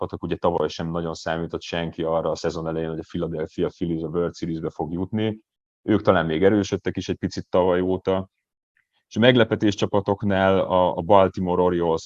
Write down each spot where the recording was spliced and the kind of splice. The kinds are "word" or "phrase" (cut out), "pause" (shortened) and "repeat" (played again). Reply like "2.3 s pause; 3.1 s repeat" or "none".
none

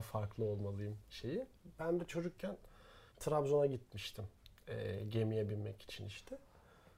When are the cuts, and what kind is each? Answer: 3.1 s pause

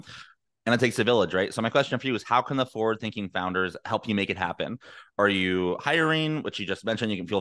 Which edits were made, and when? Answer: none

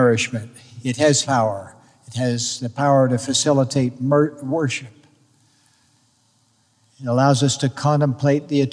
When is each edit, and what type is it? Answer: 1.2 s word

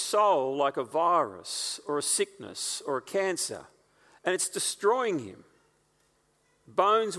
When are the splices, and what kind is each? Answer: none

